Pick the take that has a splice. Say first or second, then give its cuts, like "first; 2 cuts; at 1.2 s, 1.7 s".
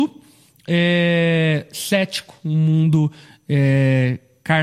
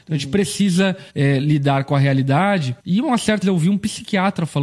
second; 3 cuts; at 1.1 s, 2.8 s, 3.4 s